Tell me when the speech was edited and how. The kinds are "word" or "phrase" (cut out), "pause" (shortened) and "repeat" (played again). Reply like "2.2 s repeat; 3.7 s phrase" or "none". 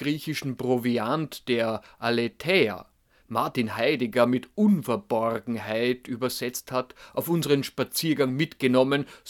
3.3 s word